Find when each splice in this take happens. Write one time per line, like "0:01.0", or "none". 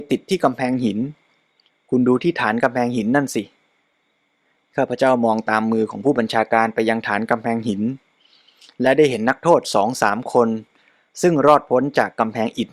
none